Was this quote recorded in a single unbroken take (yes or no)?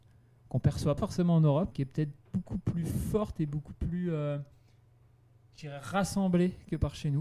no